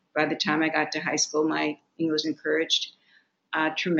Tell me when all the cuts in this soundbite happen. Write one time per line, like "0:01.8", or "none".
0:02.2

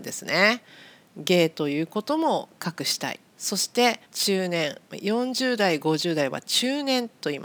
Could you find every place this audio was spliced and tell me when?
0:03.3
0:04.1

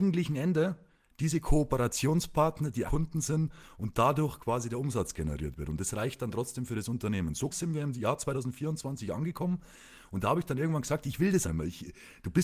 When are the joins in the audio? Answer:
0:02.9
0:07.5
0:11.4

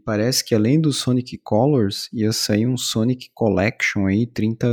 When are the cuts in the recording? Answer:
none

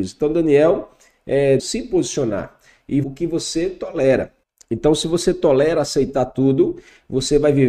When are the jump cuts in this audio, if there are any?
0:01.6
0:03.0
0:04.4

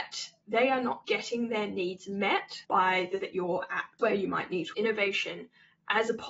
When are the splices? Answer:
0:01.0
0:02.6
0:03.2
0:04.0
0:04.7

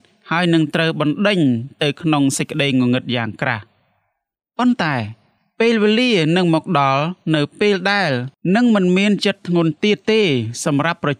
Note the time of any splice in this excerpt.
none

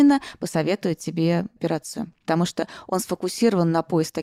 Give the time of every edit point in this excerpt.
0:02.2

